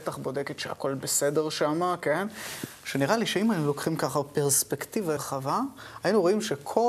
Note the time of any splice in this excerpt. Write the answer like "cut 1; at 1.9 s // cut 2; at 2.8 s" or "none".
cut 1; at 5.2 s